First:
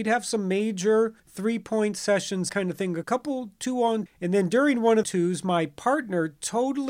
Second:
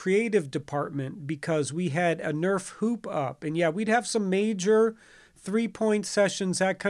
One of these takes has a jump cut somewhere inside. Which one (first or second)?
first